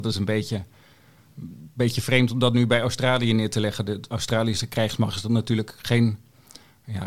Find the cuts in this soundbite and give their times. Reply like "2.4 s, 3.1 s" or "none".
none